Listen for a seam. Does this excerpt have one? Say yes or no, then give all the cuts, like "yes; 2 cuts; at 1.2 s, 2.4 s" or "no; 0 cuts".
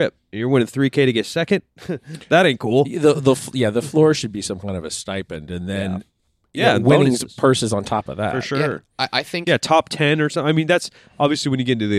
no; 0 cuts